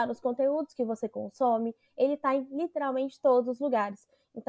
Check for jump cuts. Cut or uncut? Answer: uncut